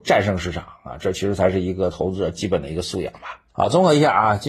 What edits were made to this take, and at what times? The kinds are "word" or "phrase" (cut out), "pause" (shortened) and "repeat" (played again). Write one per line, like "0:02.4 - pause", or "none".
0:03.5 - pause